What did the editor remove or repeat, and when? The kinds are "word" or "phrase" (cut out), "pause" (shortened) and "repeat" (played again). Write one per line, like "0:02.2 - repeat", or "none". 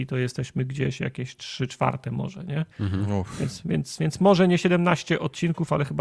0:02.7 - pause